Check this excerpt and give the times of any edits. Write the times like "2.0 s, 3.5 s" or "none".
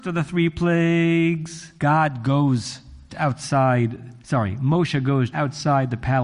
1.8 s, 3.1 s, 4.2 s, 5.3 s